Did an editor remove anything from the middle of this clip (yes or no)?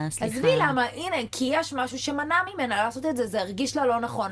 no